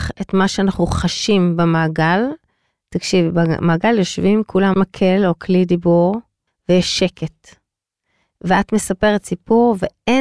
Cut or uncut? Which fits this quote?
cut